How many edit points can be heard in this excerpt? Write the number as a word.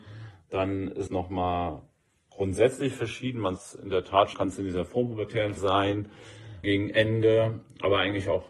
five